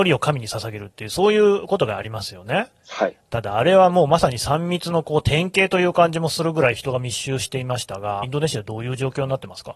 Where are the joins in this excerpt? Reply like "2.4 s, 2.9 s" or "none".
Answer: 2.8 s, 8.2 s